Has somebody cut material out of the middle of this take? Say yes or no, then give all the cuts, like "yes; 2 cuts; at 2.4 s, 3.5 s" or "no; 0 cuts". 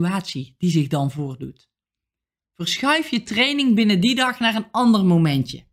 no; 0 cuts